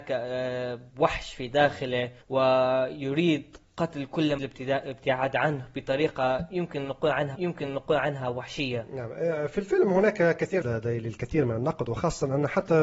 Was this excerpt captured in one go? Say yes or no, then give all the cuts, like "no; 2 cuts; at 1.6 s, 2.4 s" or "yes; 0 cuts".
no; 4 cuts; at 2.2 s, 4.4 s, 7.3 s, 10.6 s